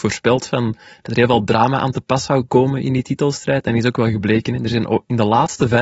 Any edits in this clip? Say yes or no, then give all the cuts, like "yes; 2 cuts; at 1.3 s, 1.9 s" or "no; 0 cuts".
no; 0 cuts